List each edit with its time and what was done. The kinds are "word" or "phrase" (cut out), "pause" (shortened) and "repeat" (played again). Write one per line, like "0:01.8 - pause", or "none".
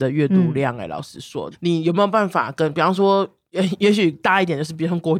0:01.5 - word